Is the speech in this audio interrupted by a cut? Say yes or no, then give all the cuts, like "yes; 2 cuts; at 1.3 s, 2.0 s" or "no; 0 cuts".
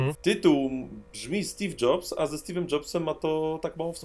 no; 0 cuts